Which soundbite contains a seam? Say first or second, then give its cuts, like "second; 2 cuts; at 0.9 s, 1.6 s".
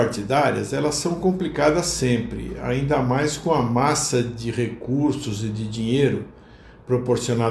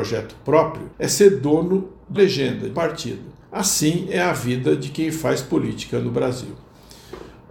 second; 4 cuts; at 0.9 s, 2.2 s, 2.7 s, 3.4 s